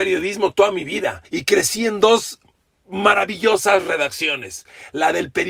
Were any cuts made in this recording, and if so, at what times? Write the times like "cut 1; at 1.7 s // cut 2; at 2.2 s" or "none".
cut 1; at 1.2 s